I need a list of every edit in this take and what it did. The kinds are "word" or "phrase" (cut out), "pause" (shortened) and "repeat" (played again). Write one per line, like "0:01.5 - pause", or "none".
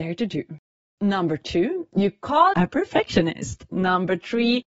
0:02.5 - word